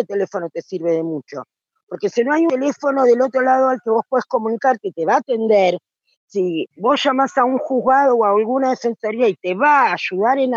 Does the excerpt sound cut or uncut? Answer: uncut